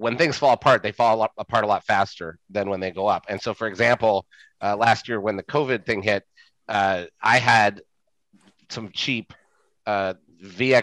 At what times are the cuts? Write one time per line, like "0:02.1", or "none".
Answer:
0:08.9